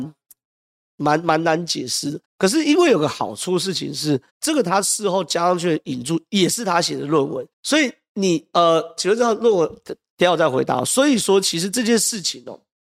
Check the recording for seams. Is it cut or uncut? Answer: cut